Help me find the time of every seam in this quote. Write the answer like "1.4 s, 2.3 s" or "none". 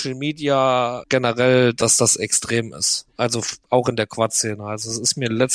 1.0 s